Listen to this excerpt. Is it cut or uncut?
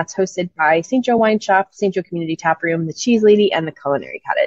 uncut